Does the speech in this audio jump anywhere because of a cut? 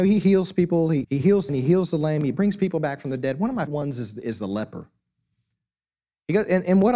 yes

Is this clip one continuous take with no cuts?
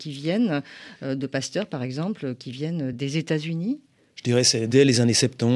yes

